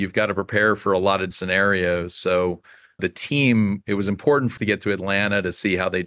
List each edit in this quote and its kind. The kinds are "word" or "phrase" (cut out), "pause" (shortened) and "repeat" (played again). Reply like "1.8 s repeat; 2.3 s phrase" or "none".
1.3 s word; 3.0 s word; 4.6 s word